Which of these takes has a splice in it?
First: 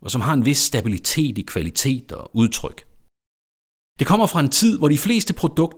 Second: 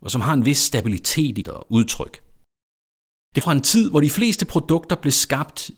second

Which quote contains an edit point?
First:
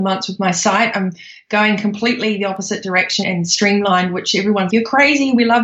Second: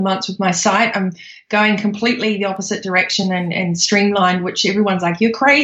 first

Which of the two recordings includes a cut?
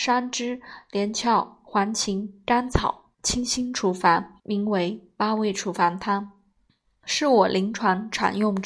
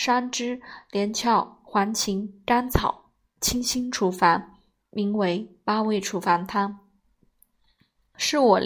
first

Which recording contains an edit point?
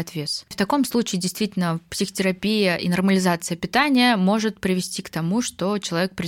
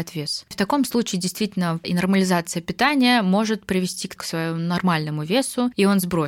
second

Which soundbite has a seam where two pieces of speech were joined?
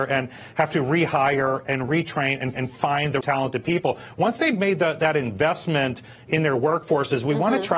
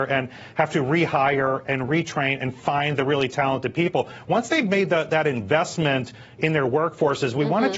first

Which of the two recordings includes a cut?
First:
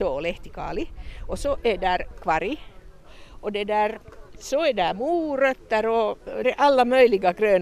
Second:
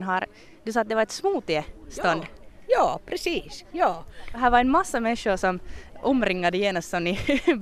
first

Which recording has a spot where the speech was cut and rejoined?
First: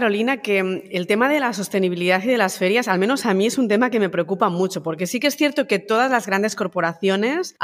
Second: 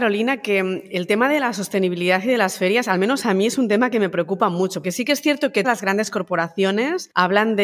second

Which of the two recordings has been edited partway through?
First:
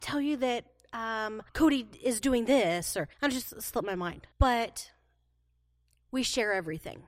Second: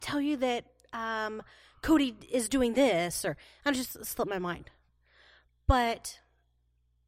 first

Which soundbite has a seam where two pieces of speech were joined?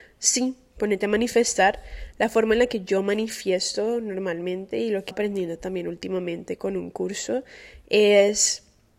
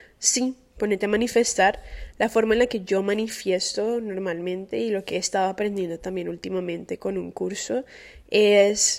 first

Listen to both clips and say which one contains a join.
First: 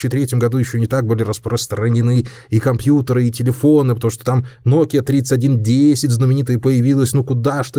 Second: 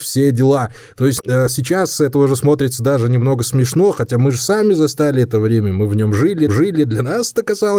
second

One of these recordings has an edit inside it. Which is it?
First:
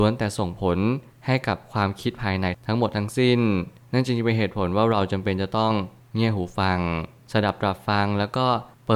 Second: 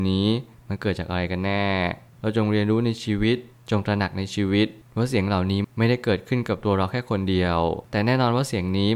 second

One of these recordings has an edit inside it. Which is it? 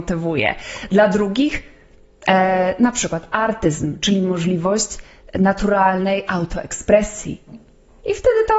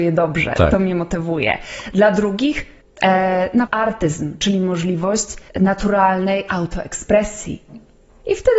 second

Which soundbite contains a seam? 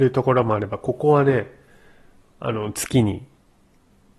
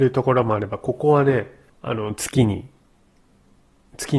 second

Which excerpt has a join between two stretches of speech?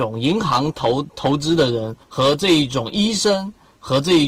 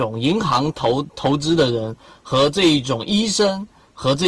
first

